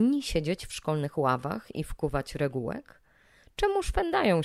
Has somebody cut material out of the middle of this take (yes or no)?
no